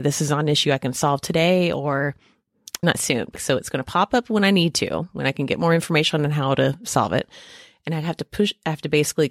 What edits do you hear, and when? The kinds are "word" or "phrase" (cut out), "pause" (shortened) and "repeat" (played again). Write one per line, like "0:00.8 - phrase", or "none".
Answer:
0:02.8 - word
0:03.3 - word